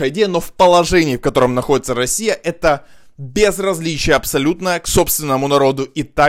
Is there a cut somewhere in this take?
no; 0 cuts

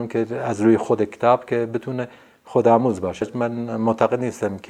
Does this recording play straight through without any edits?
yes; 0 cuts

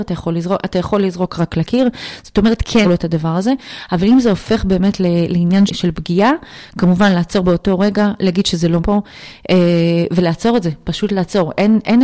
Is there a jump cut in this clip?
yes; 3 cuts; at 2.8 s, 5.7 s, 8.8 s

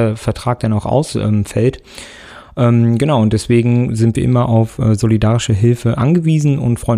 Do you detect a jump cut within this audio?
no; 0 cuts

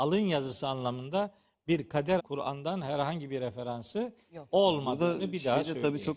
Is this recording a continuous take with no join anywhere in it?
no; 1 cut; at 2.2 s

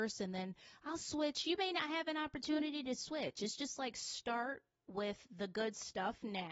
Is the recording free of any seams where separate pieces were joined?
yes; 0 cuts

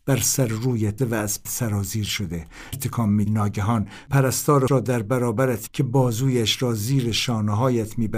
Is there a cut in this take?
yes; 6 cuts; at 1.0 s, 1.4 s, 2.7 s, 3.3 s, 4.7 s, 5.7 s

